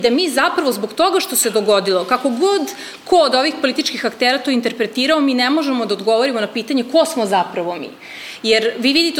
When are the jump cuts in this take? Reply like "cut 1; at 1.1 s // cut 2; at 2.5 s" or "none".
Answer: none